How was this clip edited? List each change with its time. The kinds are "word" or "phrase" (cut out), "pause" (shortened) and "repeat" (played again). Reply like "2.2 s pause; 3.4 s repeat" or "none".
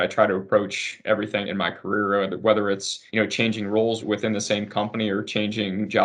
1.4 s word; 3.1 s pause; 4.0 s word